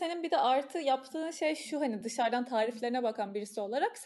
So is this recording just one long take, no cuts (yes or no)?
yes